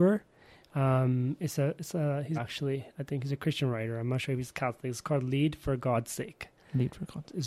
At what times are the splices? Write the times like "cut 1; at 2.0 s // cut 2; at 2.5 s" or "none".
cut 1; at 2.4 s